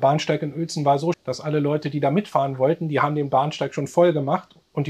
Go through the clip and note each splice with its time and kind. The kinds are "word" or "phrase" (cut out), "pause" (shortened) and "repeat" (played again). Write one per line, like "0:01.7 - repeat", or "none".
0:01.1 - word